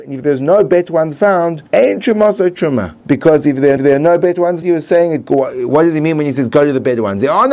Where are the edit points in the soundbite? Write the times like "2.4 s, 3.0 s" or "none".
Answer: 1.7 s, 3.0 s, 3.8 s, 4.6 s